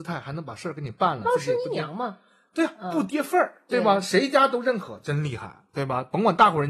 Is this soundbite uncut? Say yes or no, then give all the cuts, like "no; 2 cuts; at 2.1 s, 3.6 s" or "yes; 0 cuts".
yes; 0 cuts